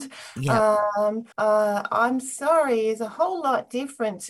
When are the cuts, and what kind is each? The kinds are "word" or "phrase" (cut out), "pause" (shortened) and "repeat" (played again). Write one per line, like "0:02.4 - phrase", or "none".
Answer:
0:01.3 - pause